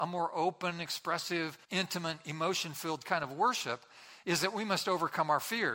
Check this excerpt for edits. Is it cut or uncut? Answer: cut